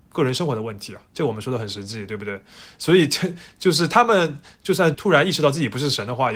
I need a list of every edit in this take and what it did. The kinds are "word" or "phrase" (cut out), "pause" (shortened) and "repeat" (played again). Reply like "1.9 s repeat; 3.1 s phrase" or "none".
1.1 s pause